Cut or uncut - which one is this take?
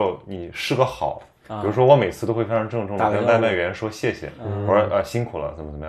uncut